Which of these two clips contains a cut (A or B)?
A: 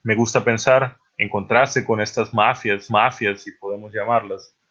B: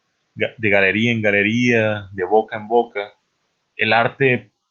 A